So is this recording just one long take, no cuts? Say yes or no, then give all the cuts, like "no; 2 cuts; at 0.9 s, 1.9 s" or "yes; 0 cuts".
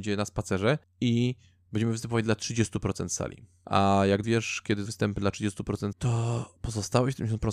no; 3 cuts; at 4.2 s, 4.9 s, 5.9 s